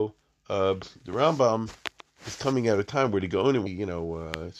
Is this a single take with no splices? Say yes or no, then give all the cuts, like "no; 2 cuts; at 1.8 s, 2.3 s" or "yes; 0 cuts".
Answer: no; 1 cut; at 3.7 s